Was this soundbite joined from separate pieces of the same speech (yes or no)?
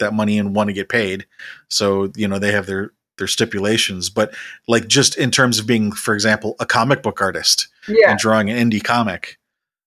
no